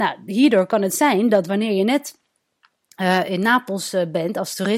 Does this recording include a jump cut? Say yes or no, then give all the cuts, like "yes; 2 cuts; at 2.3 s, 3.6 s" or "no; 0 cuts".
no; 0 cuts